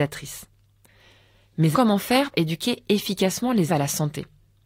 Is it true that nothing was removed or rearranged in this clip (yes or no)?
no